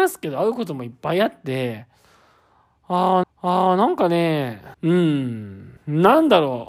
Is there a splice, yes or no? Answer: yes